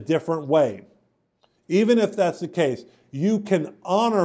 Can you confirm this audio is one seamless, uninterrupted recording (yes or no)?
yes